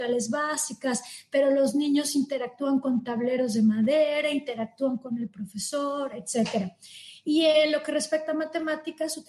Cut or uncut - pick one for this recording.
uncut